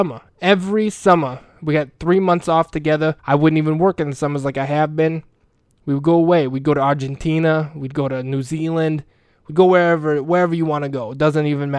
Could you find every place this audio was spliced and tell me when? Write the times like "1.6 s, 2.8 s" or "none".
3.2 s